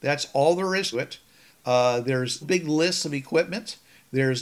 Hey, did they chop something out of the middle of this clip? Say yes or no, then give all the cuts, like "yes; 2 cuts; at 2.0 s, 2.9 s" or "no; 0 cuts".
yes; 2 cuts; at 0.9 s, 2.4 s